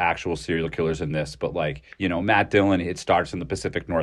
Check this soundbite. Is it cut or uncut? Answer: cut